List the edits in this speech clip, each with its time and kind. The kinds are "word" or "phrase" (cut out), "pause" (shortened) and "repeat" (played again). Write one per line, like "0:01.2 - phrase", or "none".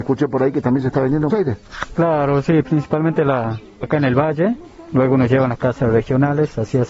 0:01.3 - word
0:03.8 - word